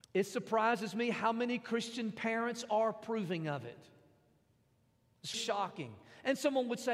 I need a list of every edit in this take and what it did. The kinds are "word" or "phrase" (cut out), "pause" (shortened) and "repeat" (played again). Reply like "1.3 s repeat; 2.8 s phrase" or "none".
5.3 s word